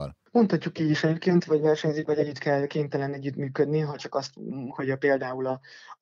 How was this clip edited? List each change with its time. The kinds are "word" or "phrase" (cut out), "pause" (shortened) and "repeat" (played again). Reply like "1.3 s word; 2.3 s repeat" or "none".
4.7 s word